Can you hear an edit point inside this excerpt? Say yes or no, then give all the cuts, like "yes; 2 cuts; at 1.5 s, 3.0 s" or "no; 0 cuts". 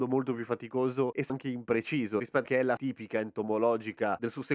yes; 3 cuts; at 1.3 s, 2.4 s, 2.8 s